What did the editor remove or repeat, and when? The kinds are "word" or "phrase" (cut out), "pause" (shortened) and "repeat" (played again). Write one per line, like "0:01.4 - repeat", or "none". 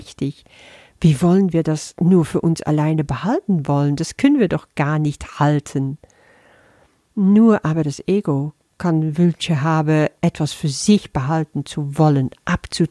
none